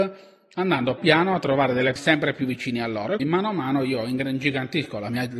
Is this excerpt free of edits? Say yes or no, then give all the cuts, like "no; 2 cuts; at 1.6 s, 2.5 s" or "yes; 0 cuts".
no; 3 cuts; at 1.0 s, 2.0 s, 3.2 s